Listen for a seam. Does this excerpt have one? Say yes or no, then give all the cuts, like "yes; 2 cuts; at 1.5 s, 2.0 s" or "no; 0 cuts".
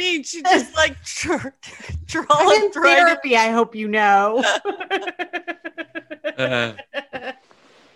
no; 0 cuts